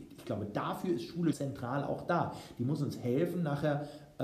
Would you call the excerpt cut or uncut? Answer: cut